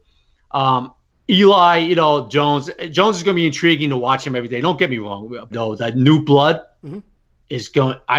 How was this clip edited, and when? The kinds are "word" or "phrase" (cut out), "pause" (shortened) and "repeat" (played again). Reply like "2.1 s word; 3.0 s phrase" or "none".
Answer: 5.5 s phrase